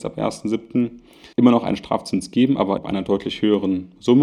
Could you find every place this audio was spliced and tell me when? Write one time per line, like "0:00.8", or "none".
0:01.3
0:02.8